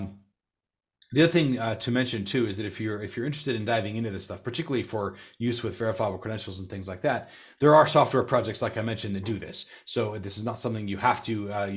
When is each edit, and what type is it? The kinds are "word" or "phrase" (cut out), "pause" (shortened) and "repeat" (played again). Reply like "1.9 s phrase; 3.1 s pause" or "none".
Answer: none